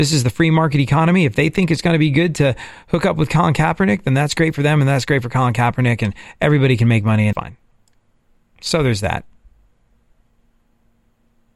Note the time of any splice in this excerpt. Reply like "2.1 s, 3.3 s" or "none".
7.3 s

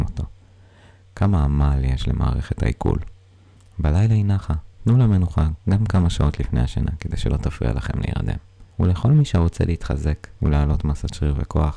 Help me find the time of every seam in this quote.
3.6 s, 4.7 s, 5.6 s, 8.7 s, 10.4 s

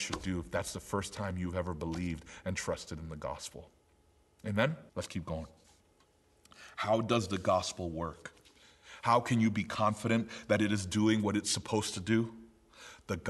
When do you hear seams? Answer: 4.9 s

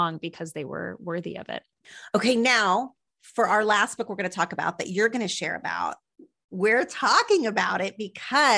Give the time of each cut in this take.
none

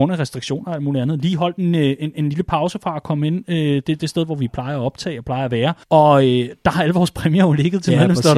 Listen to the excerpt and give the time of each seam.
5.8 s

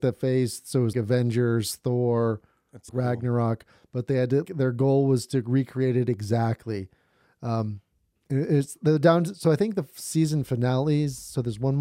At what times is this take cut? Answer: 0.9 s, 2.9 s, 4.4 s

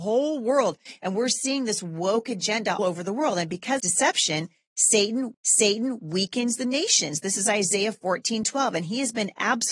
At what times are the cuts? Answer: 2.8 s, 3.8 s, 5.3 s

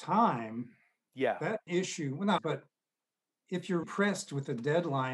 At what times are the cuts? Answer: 1.7 s, 2.4 s, 3.8 s

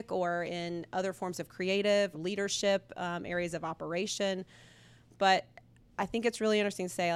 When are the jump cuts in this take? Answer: 2.1 s

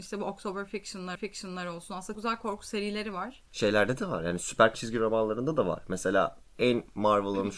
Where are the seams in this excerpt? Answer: 1.1 s, 2.1 s, 3.5 s, 4.7 s

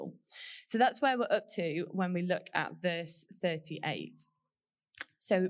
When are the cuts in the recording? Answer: none

